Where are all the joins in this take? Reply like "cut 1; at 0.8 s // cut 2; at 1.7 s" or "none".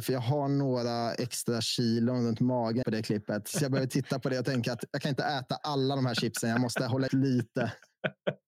cut 1; at 2.8 s // cut 2; at 7.1 s